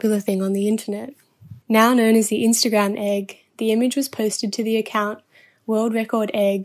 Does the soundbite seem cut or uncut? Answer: cut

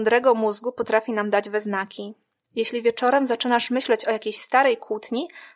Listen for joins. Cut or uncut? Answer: uncut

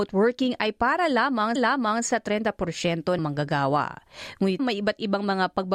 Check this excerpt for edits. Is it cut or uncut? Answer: cut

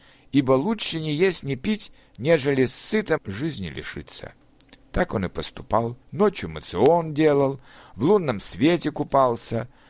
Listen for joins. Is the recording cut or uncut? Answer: cut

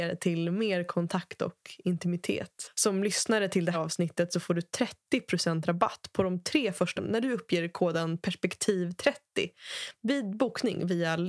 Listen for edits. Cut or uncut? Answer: cut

